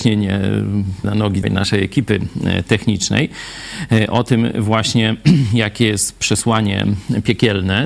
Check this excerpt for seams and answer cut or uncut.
cut